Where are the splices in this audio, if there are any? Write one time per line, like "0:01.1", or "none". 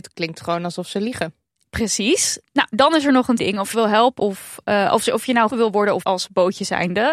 0:03.4
0:03.7
0:04.2
0:05.5
0:06.0